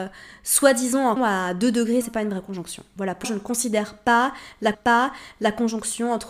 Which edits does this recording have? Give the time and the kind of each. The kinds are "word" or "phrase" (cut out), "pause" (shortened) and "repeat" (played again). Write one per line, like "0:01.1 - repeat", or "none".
0:01.2 - phrase
0:02.0 - phrase
0:03.2 - word
0:04.7 - repeat

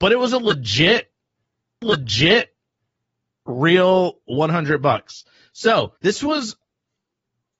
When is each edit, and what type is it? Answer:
0:01.8 - repeat
0:06.0 - pause

